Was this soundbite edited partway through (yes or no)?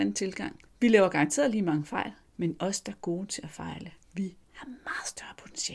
no